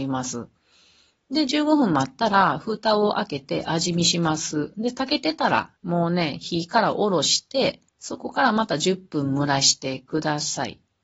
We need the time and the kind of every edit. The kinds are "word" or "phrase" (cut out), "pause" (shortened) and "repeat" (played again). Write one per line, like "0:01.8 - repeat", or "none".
0:05.8 - pause
0:07.9 - pause